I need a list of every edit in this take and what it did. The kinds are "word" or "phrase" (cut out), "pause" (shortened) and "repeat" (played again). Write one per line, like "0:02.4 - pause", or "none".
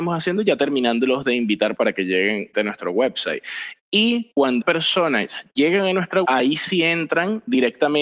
0:01.8 - word
0:02.5 - word
0:04.6 - word
0:06.2 - word

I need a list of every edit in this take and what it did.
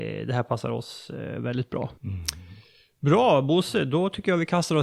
0:02.0 - pause

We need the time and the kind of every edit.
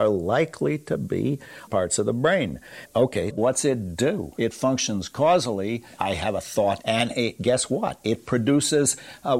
0:01.7 - phrase
0:03.3 - word
0:06.8 - phrase

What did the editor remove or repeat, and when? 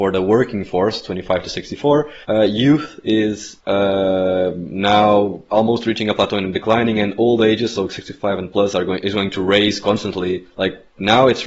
0:02.2 - pause
0:03.6 - pause
0:06.5 - word

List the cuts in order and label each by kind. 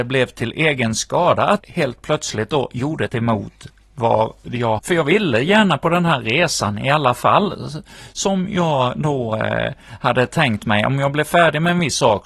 0:01.6 - word
0:03.1 - word
0:04.8 - phrase

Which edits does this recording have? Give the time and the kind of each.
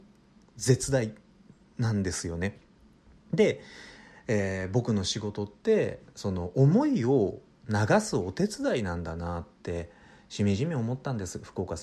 none

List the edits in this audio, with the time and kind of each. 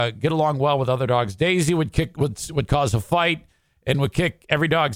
none

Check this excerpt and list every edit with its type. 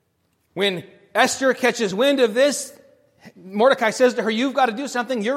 none

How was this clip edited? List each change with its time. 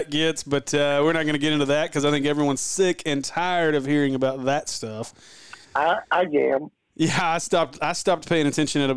0:05.6 - pause

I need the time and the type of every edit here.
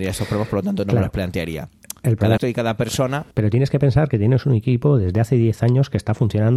0:02.4 - word
0:03.3 - pause

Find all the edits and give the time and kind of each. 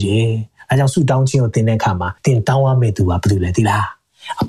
0:02.2 - pause

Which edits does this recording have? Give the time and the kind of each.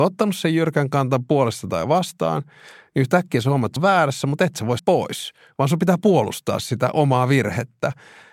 0:03.8 - word
0:04.8 - phrase

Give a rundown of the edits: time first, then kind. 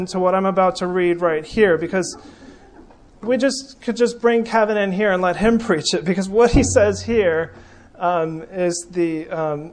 none

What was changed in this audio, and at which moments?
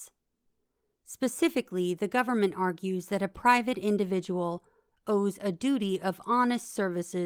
none

